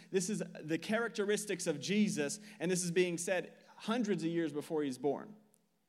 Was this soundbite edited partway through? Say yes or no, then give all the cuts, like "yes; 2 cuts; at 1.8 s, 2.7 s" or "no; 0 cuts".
no; 0 cuts